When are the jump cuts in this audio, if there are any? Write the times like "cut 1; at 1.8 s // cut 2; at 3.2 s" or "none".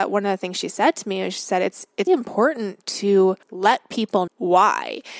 cut 1; at 2.1 s // cut 2; at 3.4 s // cut 3; at 4.3 s